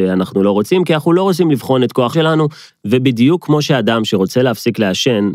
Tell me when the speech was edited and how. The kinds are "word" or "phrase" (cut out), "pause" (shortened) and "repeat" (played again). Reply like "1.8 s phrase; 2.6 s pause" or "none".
2.1 s word